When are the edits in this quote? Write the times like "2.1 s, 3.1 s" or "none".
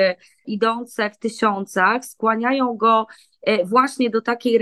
none